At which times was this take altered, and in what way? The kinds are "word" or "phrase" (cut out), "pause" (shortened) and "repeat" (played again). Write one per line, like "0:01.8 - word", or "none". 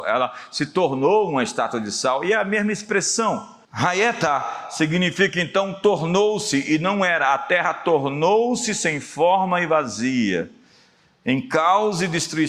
0:03.6 - pause

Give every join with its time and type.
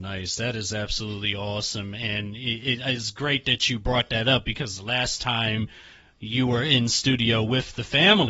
none

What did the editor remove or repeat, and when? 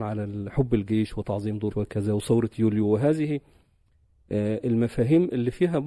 0:01.7 - word

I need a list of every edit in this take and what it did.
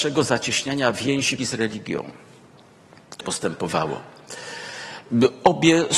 0:01.4 - word
0:03.2 - word

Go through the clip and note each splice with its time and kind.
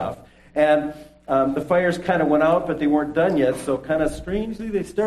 none

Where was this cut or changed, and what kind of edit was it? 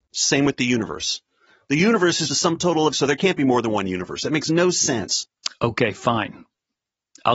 0:02.3 - word
0:02.9 - word

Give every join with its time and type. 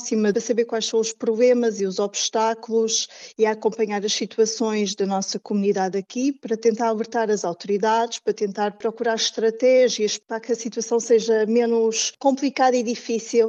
none

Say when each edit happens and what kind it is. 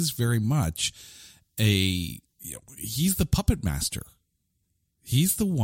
0:02.3 - pause

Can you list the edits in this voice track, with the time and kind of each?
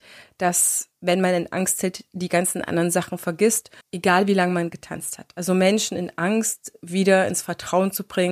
0:00.9 - pause
0:03.8 - pause

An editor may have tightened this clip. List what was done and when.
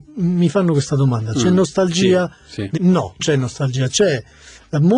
0:02.8 - word
0:03.2 - word

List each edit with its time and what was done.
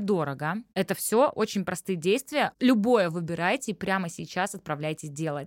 none

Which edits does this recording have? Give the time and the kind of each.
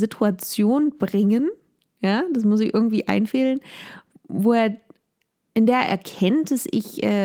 none

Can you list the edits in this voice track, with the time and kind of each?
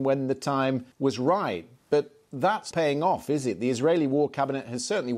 0:00.9 - pause
0:02.7 - word

